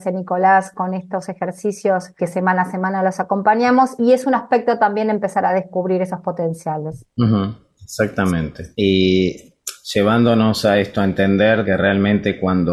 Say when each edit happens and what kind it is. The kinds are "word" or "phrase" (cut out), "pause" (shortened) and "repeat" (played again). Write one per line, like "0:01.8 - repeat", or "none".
0:02.2 - word
0:04.0 - word
0:07.1 - pause
0:08.7 - pause
0:11.6 - word